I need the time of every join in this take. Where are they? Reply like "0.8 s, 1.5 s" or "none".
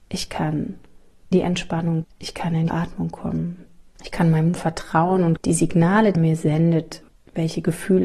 1.3 s, 2.0 s, 2.7 s, 4.6 s, 5.4 s, 6.1 s